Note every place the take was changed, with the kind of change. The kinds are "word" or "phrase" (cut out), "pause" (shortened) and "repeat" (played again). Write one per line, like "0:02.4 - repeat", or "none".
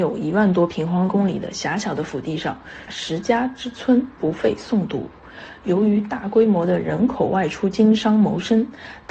0:02.9 - phrase

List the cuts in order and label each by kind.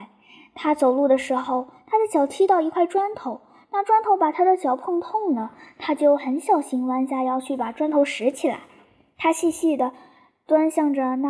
none

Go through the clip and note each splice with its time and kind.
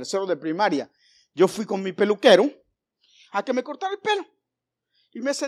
none

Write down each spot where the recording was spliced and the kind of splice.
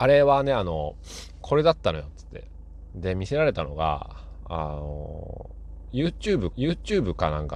0:06.5 - repeat

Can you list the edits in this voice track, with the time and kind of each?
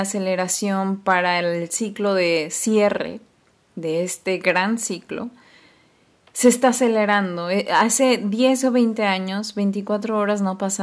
none

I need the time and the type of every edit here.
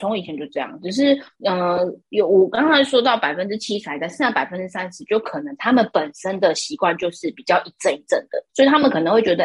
0:01.3 - pause
0:08.5 - pause

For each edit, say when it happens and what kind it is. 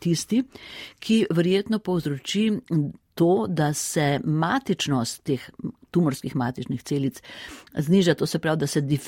none

